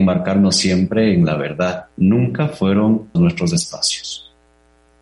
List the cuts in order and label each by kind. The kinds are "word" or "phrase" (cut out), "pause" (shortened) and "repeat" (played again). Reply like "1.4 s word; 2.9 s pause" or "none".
1.9 s pause; 3.1 s word